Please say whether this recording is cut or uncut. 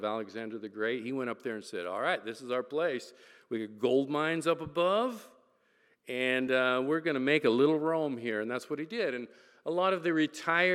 uncut